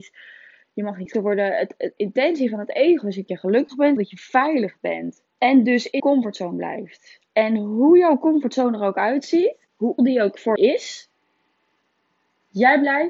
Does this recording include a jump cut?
yes; 8 cuts; at 1.1 s, 2.0 s, 3.3 s, 4.0 s, 5.3 s, 6.0 s, 10.0 s, 10.6 s

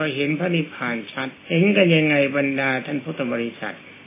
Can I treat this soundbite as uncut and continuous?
no; 1 cut; at 1.4 s

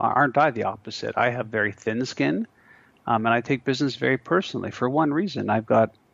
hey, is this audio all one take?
yes; 0 cuts

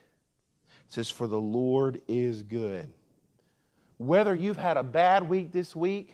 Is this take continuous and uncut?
yes; 0 cuts

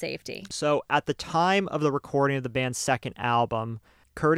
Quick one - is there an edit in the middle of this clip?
no; 0 cuts

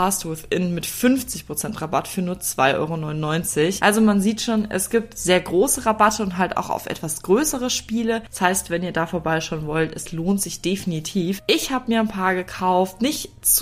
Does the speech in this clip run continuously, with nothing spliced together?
yes; 0 cuts

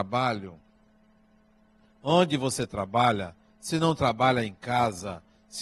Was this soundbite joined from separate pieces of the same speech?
no; 0 cuts

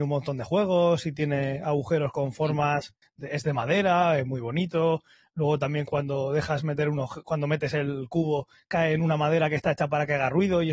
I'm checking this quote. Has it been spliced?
no; 0 cuts

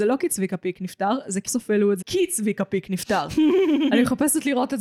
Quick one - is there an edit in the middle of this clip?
yes; 2 cuts; at 1.5 s, 2.0 s

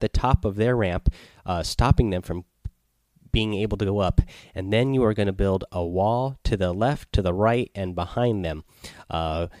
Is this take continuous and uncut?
yes; 0 cuts

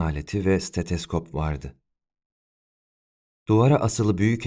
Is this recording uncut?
yes; 0 cuts

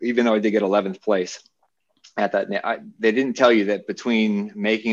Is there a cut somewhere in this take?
no; 0 cuts

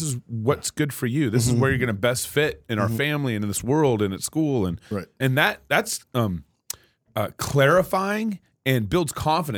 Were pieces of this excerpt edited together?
no; 0 cuts

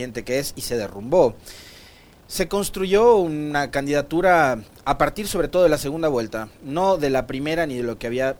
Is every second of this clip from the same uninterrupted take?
yes; 0 cuts

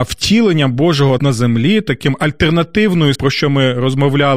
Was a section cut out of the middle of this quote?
yes; 2 cuts; at 1.2 s, 3.2 s

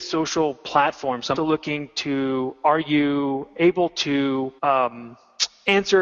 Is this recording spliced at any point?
yes; 2 cuts; at 1.4 s, 4.6 s

